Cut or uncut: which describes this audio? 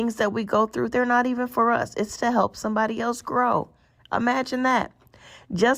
uncut